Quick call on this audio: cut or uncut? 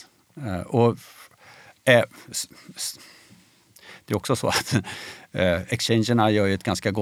uncut